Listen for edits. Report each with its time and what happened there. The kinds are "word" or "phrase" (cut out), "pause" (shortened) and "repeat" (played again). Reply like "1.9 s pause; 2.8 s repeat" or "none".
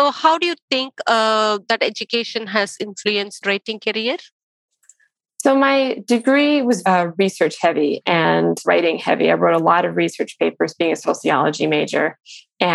3.4 s phrase; 6.8 s word; 8.6 s word